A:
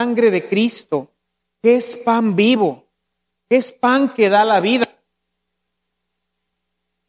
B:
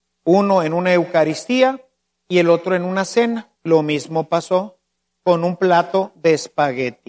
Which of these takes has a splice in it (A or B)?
B